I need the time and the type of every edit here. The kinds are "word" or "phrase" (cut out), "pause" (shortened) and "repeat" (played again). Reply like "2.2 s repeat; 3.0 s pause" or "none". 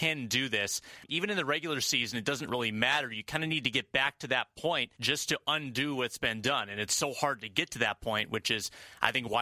4.9 s pause